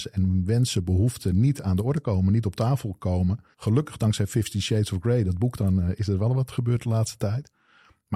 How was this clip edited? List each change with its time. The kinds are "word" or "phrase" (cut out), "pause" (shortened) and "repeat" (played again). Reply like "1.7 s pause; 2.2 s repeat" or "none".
3.5 s pause; 6.5 s word